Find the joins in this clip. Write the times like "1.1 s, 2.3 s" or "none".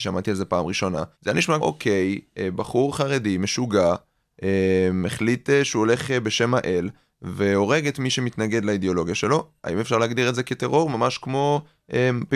1.1 s, 1.6 s